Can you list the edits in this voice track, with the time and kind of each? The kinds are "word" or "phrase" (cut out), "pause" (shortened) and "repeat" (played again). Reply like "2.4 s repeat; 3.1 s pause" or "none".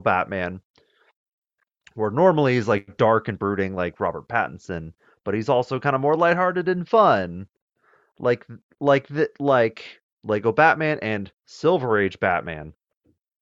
none